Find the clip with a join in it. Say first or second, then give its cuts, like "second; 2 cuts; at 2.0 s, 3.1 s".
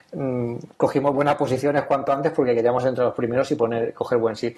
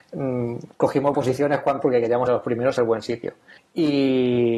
second; 5 cuts; at 1.1 s, 1.8 s, 2.3 s, 2.8 s, 3.6 s